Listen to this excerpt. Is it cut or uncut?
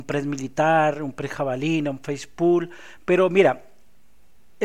uncut